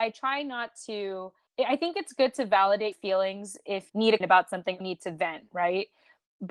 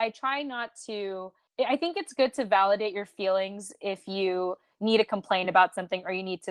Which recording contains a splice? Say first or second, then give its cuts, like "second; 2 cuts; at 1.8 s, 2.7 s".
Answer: first; 4 cuts; at 2.9 s, 3.9 s, 4.2 s, 4.8 s